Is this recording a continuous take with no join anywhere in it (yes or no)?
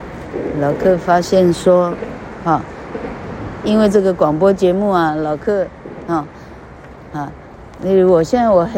yes